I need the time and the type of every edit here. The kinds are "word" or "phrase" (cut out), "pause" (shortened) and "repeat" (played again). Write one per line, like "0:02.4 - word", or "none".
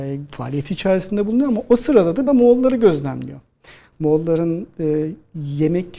0:02.3 - phrase